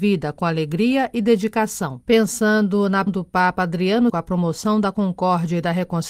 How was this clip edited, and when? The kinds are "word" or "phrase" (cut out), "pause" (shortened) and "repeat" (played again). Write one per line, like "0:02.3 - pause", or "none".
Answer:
0:02.0 - pause
0:03.1 - word
0:04.1 - word